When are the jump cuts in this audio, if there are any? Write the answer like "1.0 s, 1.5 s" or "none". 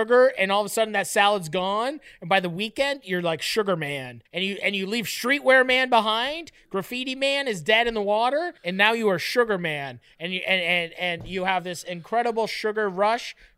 4.3 s, 8.6 s